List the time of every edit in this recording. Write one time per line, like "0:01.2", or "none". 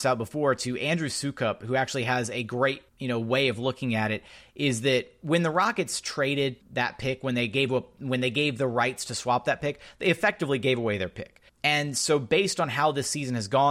0:02.9
0:06.6
0:11.5